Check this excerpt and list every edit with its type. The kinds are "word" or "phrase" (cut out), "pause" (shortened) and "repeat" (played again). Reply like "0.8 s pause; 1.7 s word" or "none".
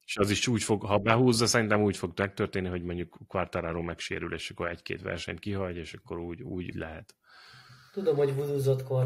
6.7 s word